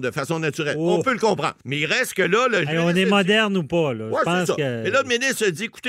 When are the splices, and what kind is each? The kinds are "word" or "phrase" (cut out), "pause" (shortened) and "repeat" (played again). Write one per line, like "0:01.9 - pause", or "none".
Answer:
0:01.6 - pause